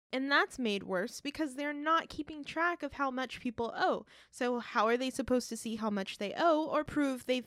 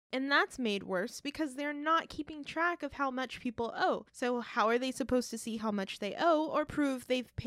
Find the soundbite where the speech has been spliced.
second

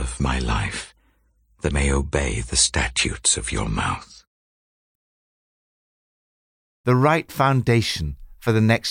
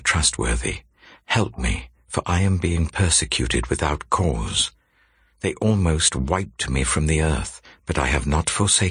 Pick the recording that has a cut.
first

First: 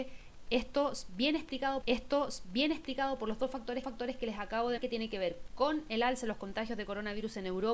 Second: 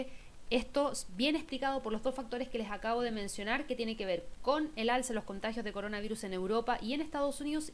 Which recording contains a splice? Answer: first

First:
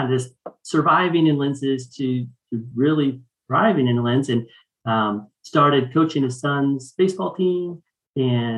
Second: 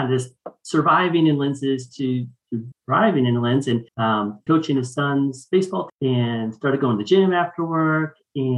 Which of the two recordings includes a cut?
second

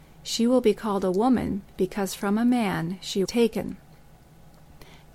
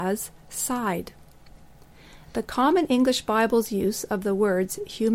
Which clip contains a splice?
first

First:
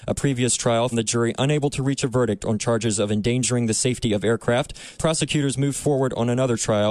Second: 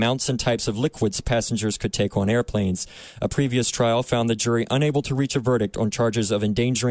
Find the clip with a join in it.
first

